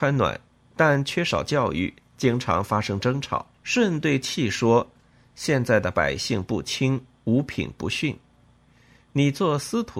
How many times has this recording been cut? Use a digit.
1